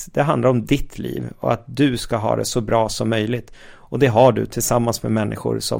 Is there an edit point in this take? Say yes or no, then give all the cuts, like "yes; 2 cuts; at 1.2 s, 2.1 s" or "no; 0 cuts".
no; 0 cuts